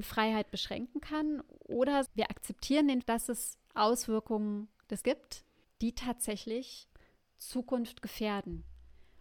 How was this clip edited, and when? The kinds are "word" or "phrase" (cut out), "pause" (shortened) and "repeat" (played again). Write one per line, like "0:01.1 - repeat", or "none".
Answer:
0:02.1 - phrase
0:03.0 - word
0:03.6 - pause
0:05.0 - word
0:05.6 - pause